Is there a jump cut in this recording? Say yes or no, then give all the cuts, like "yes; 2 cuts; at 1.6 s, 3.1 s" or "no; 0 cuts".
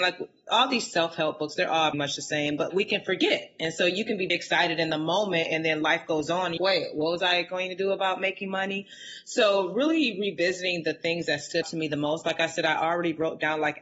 yes; 5 cuts; at 1.9 s, 2.7 s, 4.3 s, 6.6 s, 11.6 s